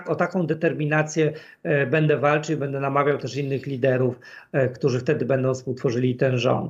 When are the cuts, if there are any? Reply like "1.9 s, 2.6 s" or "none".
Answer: none